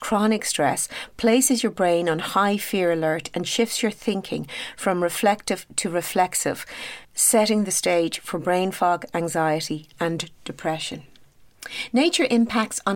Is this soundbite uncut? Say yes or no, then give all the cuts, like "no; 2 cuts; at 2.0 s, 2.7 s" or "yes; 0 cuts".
no; 1 cut; at 7.0 s